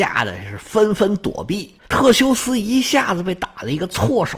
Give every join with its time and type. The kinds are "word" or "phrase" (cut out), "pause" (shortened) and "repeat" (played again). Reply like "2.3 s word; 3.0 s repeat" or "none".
1.8 s pause